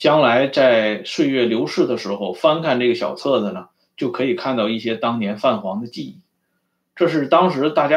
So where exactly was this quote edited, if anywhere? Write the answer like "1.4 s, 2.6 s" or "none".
none